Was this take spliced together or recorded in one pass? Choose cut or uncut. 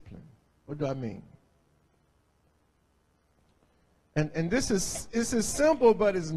uncut